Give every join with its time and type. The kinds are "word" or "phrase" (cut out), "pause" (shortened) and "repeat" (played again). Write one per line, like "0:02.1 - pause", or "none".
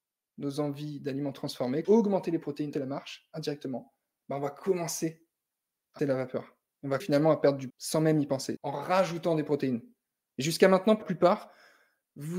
0:01.8 - word
0:02.7 - word
0:06.0 - word
0:07.0 - word
0:07.7 - word
0:08.6 - word
0:11.0 - word